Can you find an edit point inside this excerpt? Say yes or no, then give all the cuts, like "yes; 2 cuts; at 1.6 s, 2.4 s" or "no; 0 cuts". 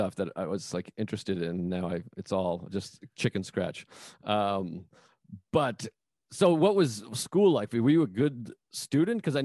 no; 0 cuts